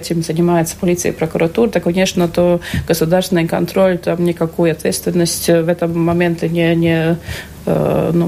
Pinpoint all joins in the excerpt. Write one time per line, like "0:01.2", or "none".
none